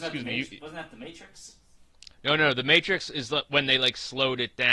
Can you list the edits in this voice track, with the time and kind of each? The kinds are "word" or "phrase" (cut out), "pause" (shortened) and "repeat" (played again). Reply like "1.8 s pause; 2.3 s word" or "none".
2.1 s pause